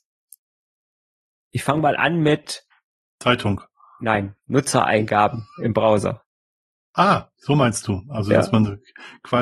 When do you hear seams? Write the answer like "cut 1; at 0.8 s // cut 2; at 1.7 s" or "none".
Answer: none